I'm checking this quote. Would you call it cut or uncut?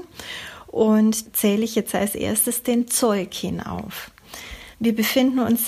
cut